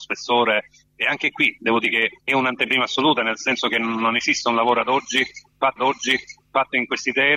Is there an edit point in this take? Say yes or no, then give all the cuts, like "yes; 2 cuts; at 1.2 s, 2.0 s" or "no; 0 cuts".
yes; 3 cuts; at 1.8 s, 2.2 s, 5.8 s